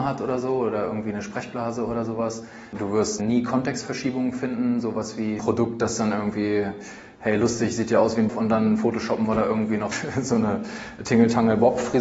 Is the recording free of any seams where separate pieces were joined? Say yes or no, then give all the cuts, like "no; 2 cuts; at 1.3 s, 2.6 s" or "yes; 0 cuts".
no; 2 cuts; at 5.4 s, 8.3 s